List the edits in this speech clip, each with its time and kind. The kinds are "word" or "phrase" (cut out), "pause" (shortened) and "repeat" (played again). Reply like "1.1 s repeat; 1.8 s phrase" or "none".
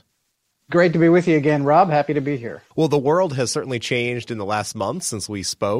2.7 s pause

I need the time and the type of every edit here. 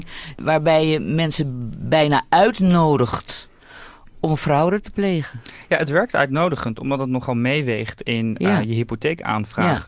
none

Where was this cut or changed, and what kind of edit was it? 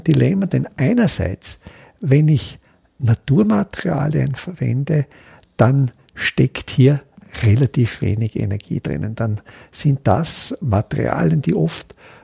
none

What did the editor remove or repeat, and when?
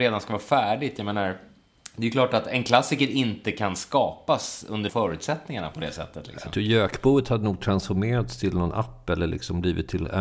4.9 s word

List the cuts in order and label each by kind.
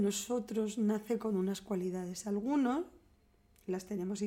none

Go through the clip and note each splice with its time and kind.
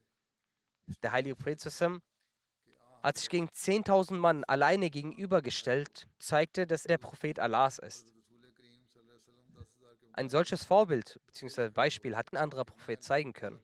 6.2 s word; 6.9 s word; 12.3 s word

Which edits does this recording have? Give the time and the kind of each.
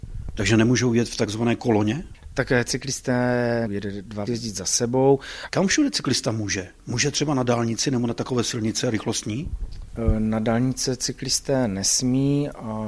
3.7 s word; 4.3 s phrase

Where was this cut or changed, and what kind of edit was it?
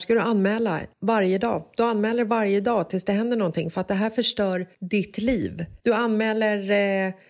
0.9 s pause; 4.7 s pause; 5.8 s pause

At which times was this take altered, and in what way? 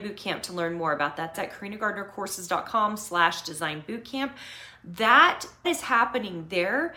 1.3 s word; 5.6 s word

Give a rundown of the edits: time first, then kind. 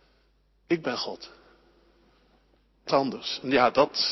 2.9 s word

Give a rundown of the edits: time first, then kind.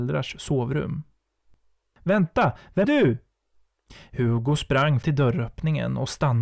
2.8 s word; 5.0 s word

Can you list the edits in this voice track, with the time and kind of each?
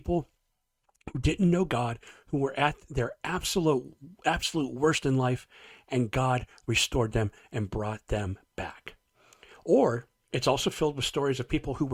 none

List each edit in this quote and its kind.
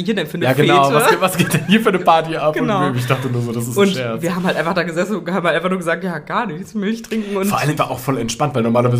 7.8 s word

